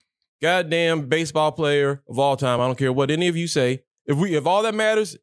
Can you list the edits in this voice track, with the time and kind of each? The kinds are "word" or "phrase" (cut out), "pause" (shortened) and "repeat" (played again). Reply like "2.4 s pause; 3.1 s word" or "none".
none